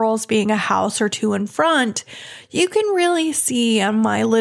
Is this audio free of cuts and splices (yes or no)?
yes